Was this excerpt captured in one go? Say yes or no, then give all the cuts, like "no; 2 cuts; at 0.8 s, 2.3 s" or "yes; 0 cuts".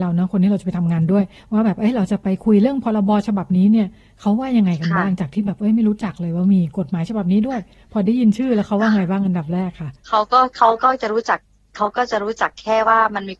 yes; 0 cuts